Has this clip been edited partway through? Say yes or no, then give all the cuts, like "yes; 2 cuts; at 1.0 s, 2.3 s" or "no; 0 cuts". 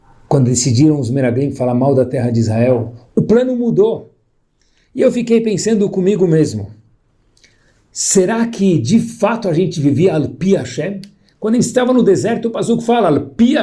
no; 0 cuts